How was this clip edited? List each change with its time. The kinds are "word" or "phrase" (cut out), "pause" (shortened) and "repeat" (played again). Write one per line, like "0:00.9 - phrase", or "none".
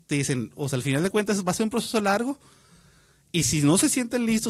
none